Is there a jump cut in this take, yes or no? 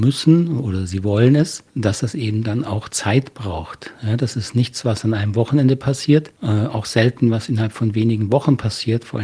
no